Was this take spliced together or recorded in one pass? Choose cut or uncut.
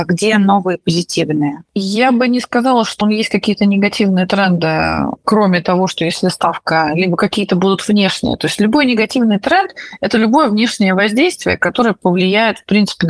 cut